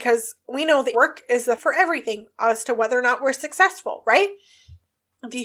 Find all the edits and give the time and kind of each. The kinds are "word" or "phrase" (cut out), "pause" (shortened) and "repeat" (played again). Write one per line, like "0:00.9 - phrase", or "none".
0:00.9 - word
0:01.6 - word